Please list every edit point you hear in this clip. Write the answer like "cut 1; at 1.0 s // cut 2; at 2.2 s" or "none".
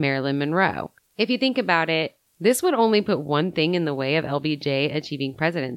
cut 1; at 2.3 s